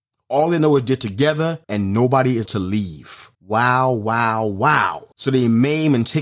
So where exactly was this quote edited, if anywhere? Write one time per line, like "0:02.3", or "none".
0:01.6
0:02.4
0:03.3
0:05.1